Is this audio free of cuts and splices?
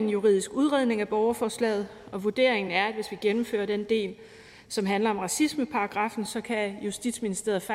yes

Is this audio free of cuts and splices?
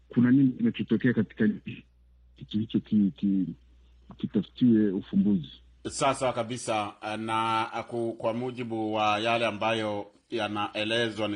yes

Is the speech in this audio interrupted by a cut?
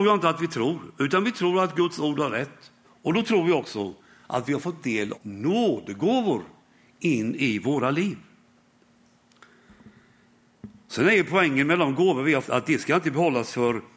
yes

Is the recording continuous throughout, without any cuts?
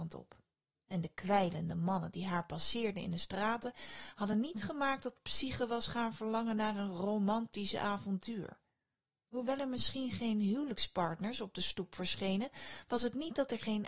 yes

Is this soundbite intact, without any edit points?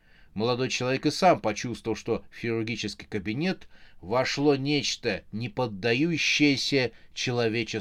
yes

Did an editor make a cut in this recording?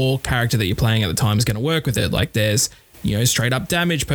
no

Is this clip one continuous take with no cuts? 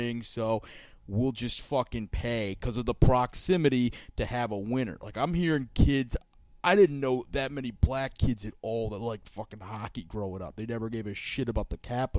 yes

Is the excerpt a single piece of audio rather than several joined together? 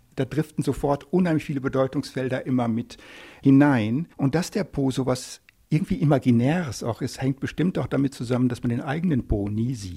no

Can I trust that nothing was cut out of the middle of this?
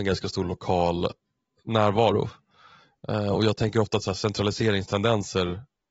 yes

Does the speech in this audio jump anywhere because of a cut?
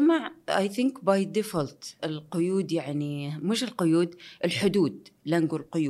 yes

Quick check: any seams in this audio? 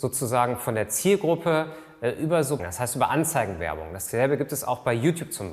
yes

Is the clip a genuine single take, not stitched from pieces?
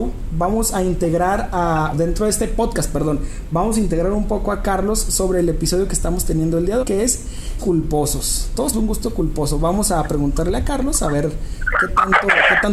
no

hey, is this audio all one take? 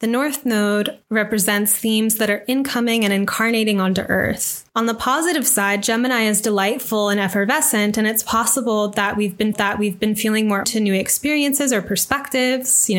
no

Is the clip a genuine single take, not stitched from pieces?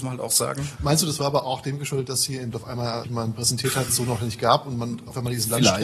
no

